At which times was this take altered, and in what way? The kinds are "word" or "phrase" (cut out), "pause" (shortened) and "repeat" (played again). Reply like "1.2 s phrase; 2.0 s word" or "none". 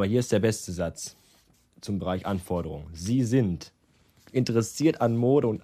none